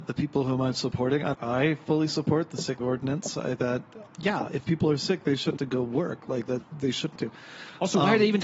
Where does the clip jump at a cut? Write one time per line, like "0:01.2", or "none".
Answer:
0:01.3
0:02.8
0:03.6
0:05.6
0:06.6
0:07.2